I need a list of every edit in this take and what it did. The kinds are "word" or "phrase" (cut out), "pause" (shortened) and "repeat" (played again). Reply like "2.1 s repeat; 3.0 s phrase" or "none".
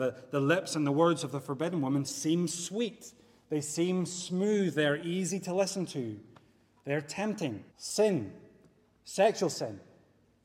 7.7 s pause